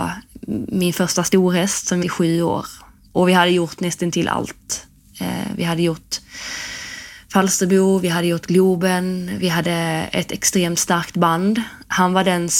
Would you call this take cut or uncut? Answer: cut